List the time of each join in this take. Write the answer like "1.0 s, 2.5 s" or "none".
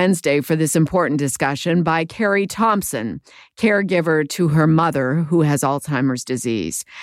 none